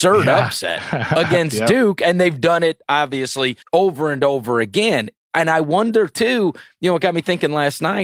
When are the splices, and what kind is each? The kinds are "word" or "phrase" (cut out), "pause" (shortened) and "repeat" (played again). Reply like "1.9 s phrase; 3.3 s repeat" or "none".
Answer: 3.6 s pause